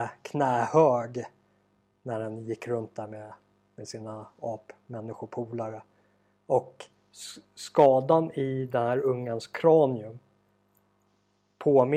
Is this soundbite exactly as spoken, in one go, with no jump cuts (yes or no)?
yes